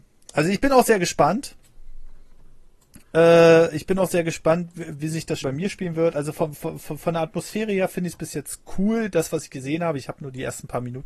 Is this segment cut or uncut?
cut